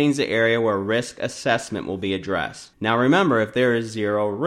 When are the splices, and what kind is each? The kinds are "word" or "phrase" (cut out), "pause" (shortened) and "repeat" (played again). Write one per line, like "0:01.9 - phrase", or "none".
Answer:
0:02.7 - pause